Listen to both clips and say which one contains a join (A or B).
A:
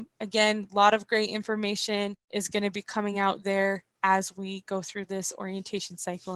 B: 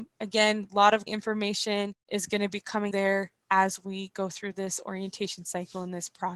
B